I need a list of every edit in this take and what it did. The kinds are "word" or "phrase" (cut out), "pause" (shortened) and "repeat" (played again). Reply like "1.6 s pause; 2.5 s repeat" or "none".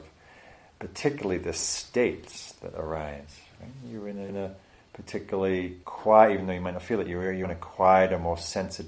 4.3 s word; 5.8 s pause; 7.4 s word